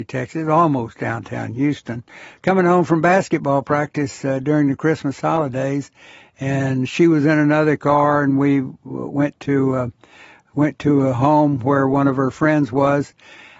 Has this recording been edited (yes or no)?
no